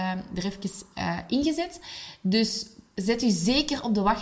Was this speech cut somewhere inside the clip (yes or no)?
no